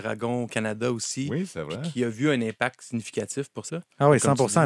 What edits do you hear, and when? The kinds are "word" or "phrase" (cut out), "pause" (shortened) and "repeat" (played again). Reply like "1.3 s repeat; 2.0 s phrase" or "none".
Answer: 3.7 s word